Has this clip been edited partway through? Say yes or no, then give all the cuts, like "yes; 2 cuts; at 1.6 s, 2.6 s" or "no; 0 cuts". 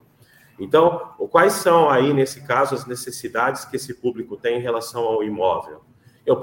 no; 0 cuts